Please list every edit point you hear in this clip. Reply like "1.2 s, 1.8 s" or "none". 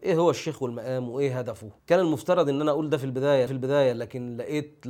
1.8 s, 3.5 s